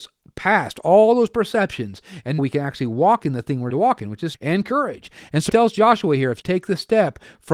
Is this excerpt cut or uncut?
cut